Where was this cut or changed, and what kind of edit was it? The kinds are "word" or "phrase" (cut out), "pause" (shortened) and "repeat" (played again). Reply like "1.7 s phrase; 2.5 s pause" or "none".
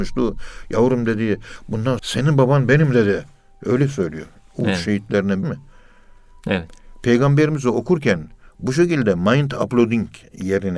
2.0 s word; 5.4 s phrase